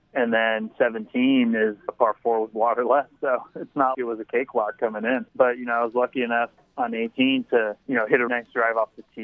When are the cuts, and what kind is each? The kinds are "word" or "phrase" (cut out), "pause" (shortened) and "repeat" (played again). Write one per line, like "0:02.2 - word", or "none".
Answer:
0:01.9 - phrase
0:03.2 - pause
0:03.9 - word
0:05.3 - pause
0:07.8 - pause
0:08.3 - word